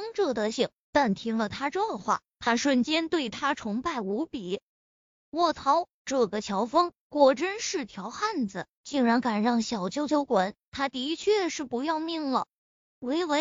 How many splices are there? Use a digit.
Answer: 1